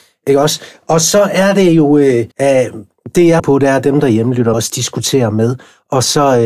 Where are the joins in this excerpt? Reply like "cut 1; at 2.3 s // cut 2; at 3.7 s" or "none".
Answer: cut 1; at 2.3 s // cut 2; at 3.4 s // cut 3; at 4.5 s